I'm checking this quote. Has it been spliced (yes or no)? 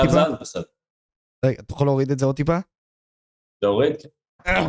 no